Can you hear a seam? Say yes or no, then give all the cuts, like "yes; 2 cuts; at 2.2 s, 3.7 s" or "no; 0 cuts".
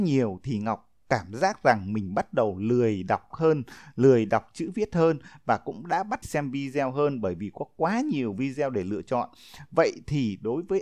yes; 2 cuts; at 3.3 s, 6.2 s